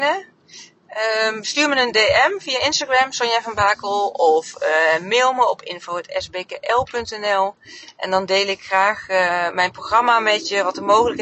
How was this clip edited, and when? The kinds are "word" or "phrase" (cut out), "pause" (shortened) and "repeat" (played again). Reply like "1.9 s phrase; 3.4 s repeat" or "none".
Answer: none